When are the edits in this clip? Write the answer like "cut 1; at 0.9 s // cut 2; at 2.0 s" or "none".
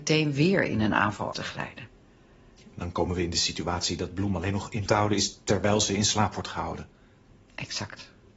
cut 1; at 1.3 s // cut 2; at 4.9 s